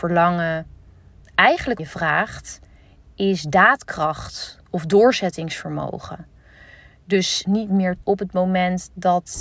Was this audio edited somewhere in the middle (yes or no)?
yes